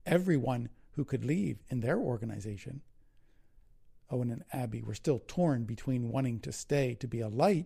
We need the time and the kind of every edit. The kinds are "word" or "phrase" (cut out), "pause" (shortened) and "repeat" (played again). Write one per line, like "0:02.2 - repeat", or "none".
none